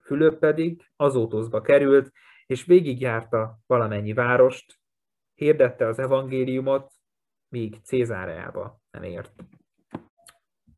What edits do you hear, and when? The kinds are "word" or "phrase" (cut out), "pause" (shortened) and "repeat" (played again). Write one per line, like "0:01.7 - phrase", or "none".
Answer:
none